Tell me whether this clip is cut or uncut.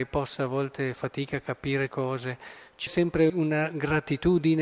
cut